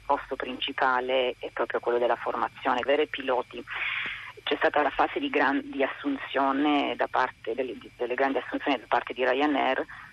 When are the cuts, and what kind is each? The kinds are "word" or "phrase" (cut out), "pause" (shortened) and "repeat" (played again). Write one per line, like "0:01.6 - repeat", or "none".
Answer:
0:02.9 - word